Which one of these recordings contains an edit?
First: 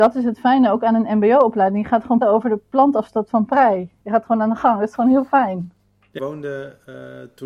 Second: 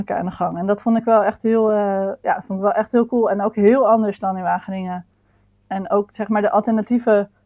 first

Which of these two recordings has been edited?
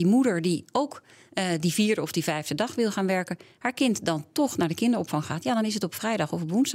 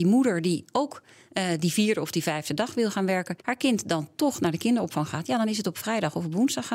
second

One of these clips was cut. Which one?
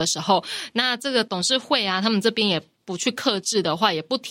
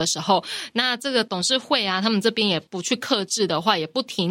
second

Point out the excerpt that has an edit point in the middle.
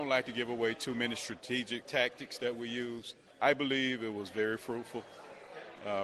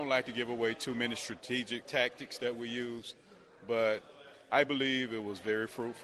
first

